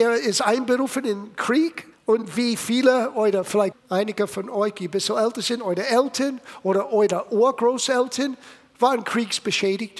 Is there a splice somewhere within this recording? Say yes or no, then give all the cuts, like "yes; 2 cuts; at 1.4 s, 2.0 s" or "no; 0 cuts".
yes; 2 cuts; at 1.9 s, 3.7 s